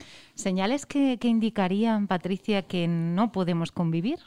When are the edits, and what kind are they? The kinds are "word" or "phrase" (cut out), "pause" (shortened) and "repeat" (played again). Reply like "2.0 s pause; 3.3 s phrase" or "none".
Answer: none